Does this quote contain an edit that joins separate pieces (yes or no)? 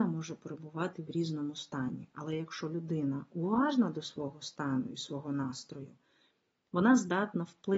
no